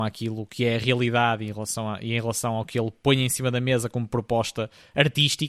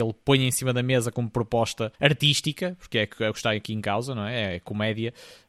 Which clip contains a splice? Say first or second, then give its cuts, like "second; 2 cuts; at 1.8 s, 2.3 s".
second; 1 cut; at 1.9 s